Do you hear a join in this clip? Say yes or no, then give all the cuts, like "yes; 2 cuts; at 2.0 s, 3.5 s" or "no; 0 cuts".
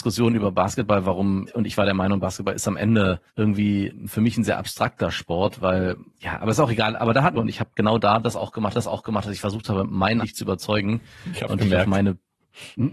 yes; 7 cuts; at 1.5 s, 3.3 s, 6.1 s, 7.3 s, 8.7 s, 10.2 s, 11.5 s